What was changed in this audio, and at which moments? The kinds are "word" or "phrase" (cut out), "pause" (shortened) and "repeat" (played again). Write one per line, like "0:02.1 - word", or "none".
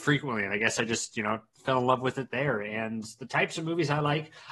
none